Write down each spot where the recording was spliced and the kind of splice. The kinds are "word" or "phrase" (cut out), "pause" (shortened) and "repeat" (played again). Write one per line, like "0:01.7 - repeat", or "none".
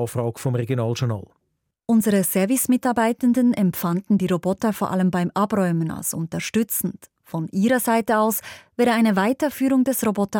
none

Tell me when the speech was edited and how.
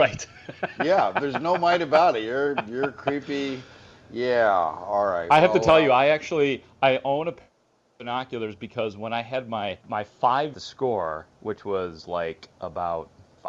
0:09.8 - pause
0:10.5 - phrase

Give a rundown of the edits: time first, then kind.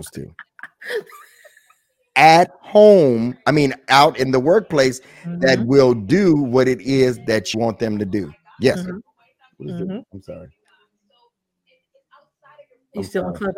0:07.5 - word

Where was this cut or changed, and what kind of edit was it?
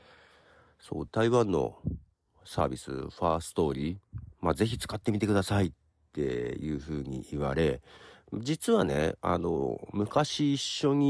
0:01.1 - word

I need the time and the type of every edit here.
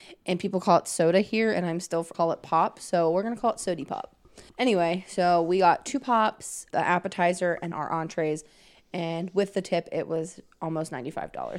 0:02.1 - phrase
0:04.5 - pause
0:06.7 - word
0:07.7 - word

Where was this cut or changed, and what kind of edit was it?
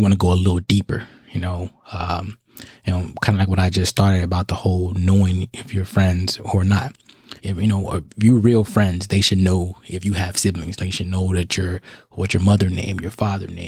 0:07.4 - pause

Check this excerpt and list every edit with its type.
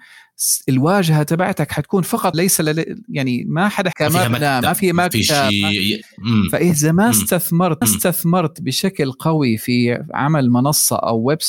0:02.3 - phrase
0:03.9 - word
0:07.8 - repeat

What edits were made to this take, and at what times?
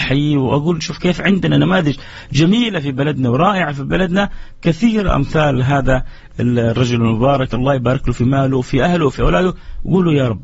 none

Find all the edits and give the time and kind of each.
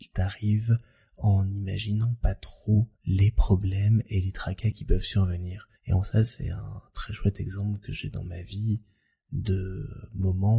0:02.9 - pause
0:05.8 - pause

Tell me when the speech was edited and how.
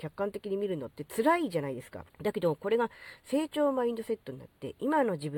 0:02.1 - pause

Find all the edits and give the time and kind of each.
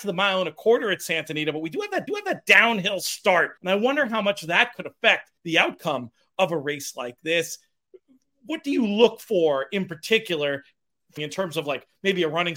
0:02.1 - repeat
0:03.6 - pause
0:05.4 - pause
0:11.2 - phrase

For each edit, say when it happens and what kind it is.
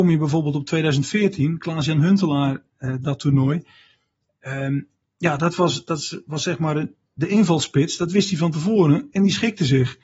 none

